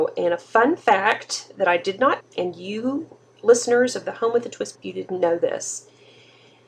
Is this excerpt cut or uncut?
cut